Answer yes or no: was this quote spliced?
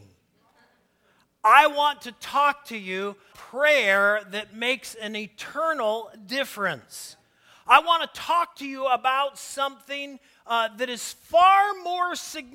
yes